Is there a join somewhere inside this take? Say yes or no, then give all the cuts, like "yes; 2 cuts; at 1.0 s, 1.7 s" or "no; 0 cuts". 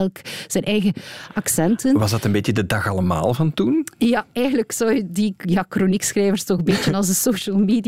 no; 0 cuts